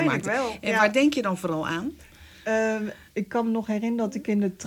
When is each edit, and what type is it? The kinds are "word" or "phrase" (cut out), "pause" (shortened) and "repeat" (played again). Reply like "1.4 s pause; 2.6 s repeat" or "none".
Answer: none